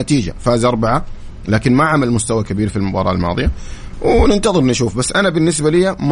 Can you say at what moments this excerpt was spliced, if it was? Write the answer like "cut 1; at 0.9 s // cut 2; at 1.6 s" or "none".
none